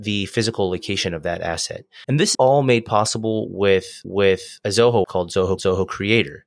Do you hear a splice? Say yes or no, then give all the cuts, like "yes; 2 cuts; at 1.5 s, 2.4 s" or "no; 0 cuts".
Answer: yes; 5 cuts; at 2.0 s, 2.3 s, 4.0 s, 5.0 s, 5.6 s